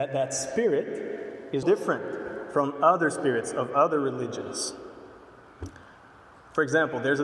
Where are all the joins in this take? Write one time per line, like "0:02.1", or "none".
0:01.6